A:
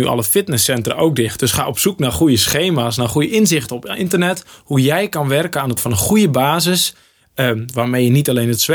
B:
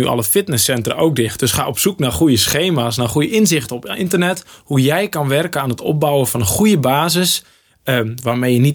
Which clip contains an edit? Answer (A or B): A